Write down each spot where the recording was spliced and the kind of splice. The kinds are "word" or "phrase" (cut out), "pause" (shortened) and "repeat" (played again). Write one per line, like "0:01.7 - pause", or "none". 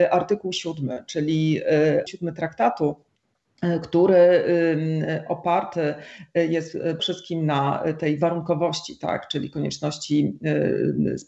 0:02.1 - word
0:07.0 - word